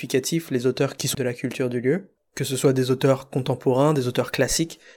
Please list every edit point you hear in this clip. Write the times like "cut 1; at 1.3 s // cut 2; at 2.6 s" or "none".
cut 1; at 1.1 s // cut 2; at 2.2 s

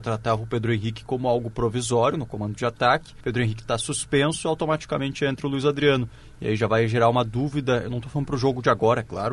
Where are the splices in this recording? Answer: cut 1; at 3.2 s

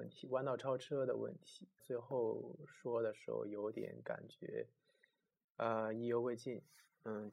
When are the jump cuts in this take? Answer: cut 1; at 1.8 s

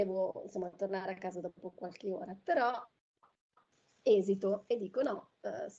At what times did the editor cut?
none

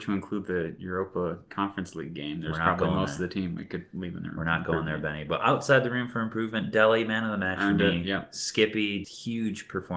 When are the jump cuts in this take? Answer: cut 1; at 9.0 s

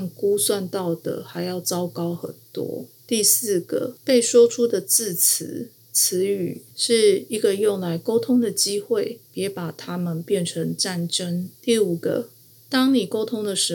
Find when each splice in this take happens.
cut 1; at 6.7 s // cut 2; at 11.5 s

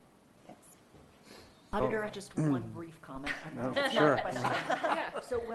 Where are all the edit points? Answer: cut 1; at 2.1 s // cut 2; at 3.7 s

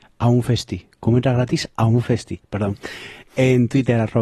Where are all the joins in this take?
none

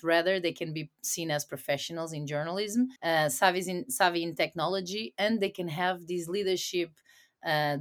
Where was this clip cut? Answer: cut 1; at 3.0 s

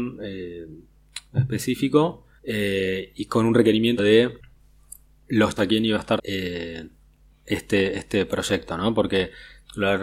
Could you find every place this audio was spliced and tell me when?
cut 1; at 1.3 s // cut 2; at 2.4 s // cut 3; at 4.0 s // cut 4; at 5.6 s // cut 5; at 6.2 s

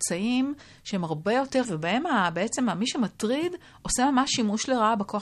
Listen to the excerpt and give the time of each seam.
cut 1; at 1.6 s

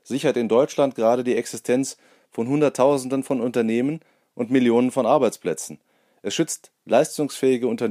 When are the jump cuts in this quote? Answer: none

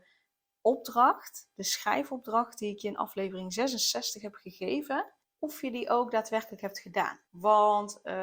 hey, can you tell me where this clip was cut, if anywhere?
cut 1; at 5.2 s // cut 2; at 7.2 s

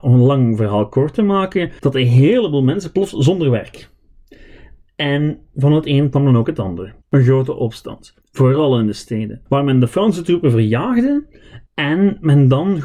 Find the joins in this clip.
cut 1; at 1.8 s // cut 2; at 5.5 s // cut 3; at 7.0 s // cut 4; at 8.2 s // cut 5; at 9.5 s // cut 6; at 11.7 s

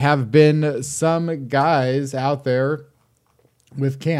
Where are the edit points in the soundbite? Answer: none

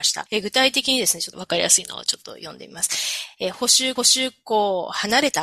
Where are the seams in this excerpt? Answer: cut 1; at 4.0 s

